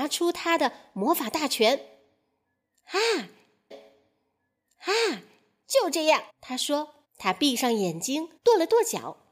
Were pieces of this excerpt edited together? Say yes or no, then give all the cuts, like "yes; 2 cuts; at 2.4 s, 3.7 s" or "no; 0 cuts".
yes; 4 cuts; at 3.7 s, 6.3 s, 7.0 s, 8.4 s